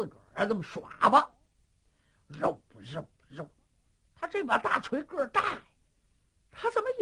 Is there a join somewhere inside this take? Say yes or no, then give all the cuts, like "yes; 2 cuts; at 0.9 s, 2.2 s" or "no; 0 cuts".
no; 0 cuts